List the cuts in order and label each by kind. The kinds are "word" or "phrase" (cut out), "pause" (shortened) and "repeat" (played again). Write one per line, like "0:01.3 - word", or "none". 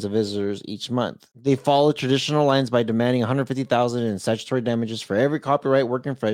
0:01.3 - pause